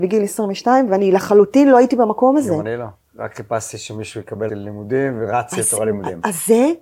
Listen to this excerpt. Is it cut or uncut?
cut